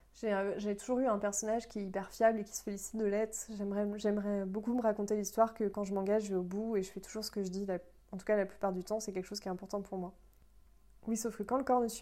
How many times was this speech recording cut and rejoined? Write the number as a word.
zero